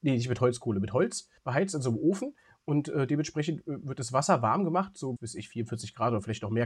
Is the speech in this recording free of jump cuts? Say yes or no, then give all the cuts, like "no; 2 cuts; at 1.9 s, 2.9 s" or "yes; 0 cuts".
no; 2 cuts; at 1.4 s, 5.2 s